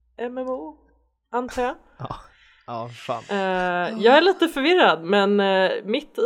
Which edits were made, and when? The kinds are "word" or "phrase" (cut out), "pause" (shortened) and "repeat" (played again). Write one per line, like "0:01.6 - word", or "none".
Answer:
none